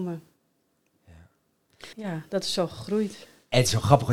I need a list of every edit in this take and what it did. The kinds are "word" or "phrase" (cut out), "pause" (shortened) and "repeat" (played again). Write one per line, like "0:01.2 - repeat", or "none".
0:01.9 - pause